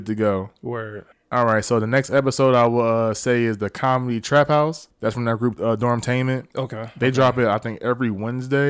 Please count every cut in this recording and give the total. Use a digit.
2